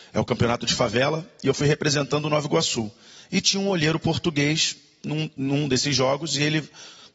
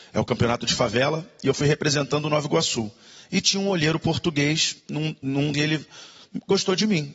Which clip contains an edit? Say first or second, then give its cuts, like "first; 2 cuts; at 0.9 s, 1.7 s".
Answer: second; 2 cuts; at 4.8 s, 5.5 s